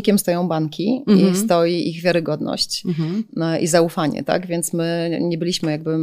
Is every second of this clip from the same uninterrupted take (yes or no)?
yes